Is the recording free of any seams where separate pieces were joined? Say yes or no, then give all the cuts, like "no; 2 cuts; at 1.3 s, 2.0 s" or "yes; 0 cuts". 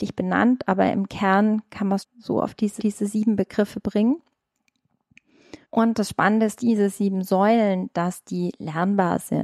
no; 4 cuts; at 2.0 s, 2.8 s, 5.6 s, 6.6 s